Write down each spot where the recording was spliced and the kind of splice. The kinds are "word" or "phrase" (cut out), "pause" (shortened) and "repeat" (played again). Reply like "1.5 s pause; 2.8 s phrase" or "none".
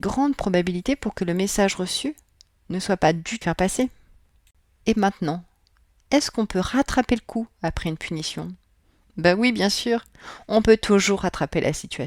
3.4 s phrase

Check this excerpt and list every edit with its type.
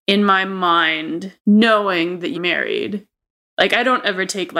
1.4 s pause; 2.3 s word

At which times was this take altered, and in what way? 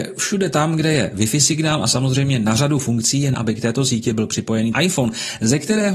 3.3 s word; 4.7 s word

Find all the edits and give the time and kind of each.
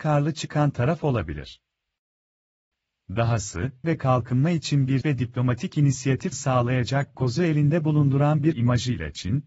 3.8 s word; 5.0 s word; 6.3 s word; 7.1 s word; 8.5 s word

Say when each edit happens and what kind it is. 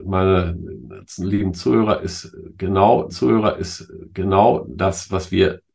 3.1 s repeat

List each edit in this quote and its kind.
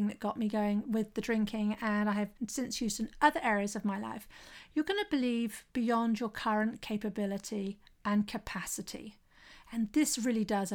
2.4 s pause

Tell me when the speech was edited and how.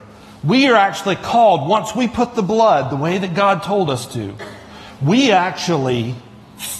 none

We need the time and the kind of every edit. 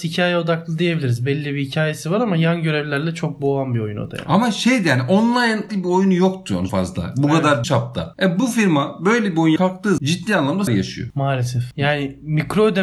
5.7 s word; 6.7 s word; 7.6 s word; 9.6 s word; 10.0 s word; 10.7 s word

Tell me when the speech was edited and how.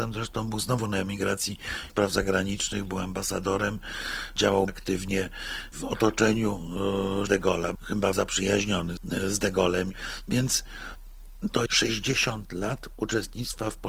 1.9 s word; 4.7 s word; 7.3 s word; 7.7 s word; 8.1 s word; 9.0 s word; 11.7 s word

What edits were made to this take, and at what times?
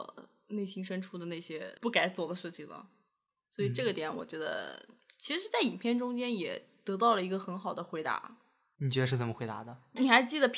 none

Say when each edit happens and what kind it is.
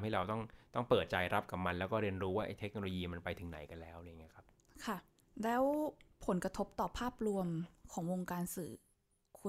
none

